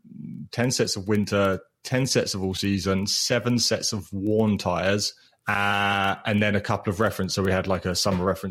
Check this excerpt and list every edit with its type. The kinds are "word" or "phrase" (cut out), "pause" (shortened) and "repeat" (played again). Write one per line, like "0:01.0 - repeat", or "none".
0:05.2 - pause